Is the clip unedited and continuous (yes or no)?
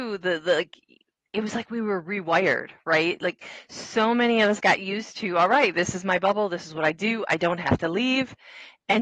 yes